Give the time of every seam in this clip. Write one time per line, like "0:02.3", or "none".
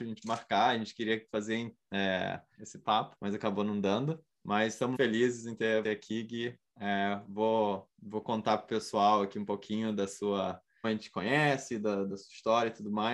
0:02.5
0:03.2
0:04.3
0:05.0
0:05.8
0:07.9
0:10.8